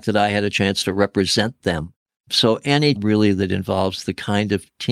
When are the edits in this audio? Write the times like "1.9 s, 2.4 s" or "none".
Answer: 2.3 s, 3.0 s